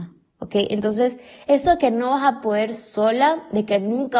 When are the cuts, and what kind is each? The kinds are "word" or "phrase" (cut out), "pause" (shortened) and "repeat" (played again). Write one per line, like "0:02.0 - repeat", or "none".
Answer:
none